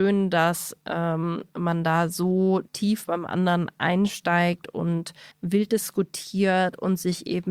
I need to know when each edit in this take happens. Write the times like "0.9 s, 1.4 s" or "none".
2.7 s, 5.3 s